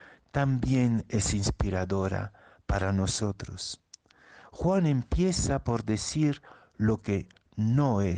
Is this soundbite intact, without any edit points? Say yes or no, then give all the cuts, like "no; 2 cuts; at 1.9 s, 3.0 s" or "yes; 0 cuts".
yes; 0 cuts